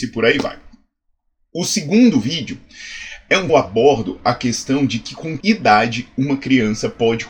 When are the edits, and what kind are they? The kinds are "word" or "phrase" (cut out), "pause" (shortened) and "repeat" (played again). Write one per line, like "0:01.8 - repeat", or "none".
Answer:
0:03.5 - phrase
0:05.4 - word